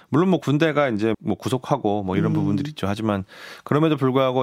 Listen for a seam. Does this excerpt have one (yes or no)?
yes